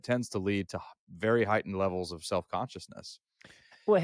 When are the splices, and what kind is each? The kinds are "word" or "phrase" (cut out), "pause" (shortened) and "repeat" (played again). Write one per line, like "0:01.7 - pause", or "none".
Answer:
none